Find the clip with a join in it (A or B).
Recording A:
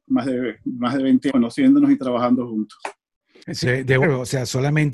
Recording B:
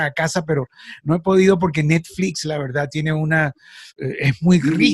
A